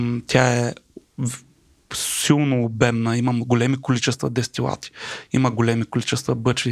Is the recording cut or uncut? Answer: uncut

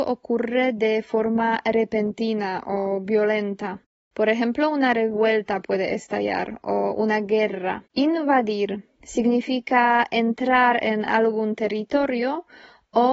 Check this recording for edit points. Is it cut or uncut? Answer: cut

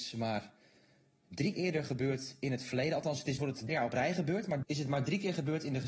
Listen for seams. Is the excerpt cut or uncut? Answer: cut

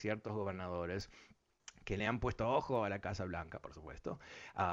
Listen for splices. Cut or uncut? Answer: uncut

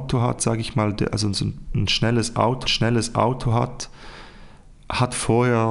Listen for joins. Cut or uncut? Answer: cut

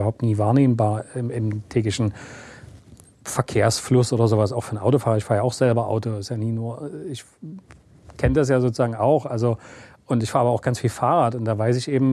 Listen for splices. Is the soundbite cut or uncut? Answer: uncut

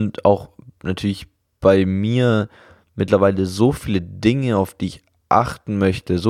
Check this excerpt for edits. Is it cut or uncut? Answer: uncut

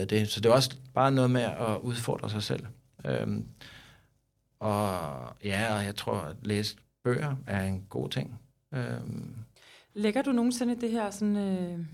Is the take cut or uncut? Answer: uncut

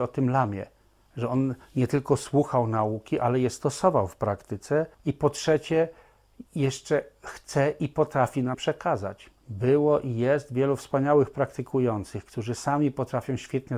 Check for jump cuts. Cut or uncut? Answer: cut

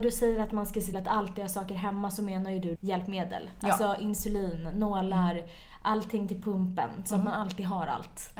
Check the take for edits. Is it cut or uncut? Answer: cut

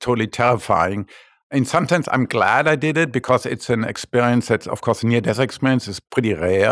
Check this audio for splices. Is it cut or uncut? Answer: uncut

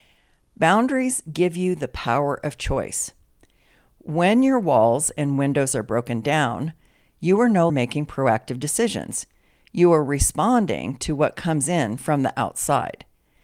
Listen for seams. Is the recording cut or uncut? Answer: cut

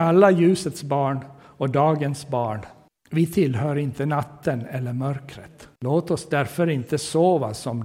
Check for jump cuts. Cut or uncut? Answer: cut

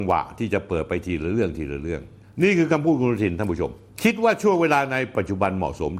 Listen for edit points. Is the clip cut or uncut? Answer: uncut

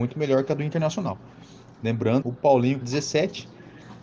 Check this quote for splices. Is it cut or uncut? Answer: cut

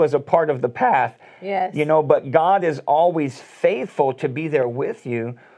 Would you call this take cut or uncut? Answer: uncut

